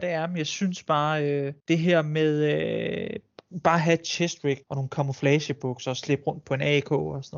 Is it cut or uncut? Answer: cut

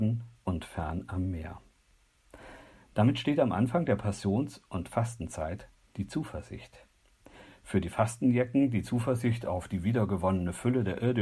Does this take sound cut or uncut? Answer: uncut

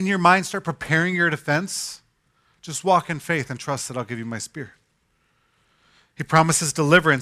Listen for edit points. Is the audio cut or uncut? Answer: uncut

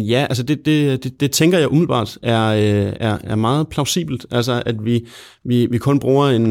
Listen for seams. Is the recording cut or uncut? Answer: uncut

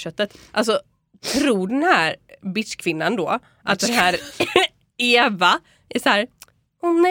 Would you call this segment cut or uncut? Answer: uncut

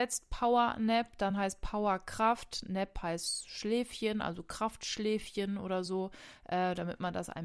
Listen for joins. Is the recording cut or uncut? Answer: uncut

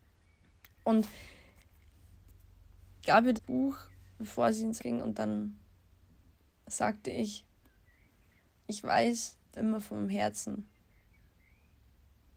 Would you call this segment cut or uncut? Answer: cut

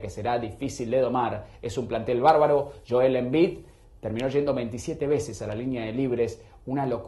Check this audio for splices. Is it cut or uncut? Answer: uncut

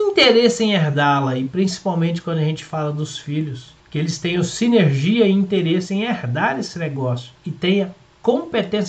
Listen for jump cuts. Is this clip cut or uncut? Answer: cut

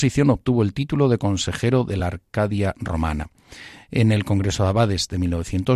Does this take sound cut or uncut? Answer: uncut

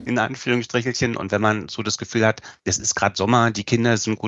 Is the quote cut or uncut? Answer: cut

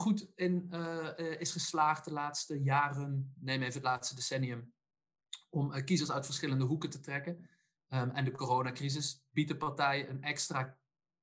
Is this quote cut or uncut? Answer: uncut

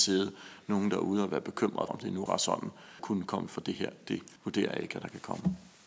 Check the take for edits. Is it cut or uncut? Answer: cut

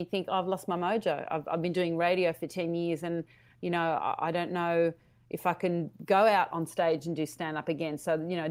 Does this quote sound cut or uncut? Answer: uncut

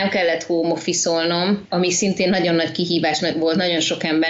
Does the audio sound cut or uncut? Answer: uncut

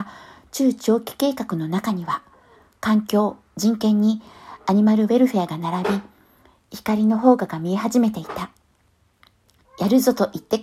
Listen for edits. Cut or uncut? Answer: uncut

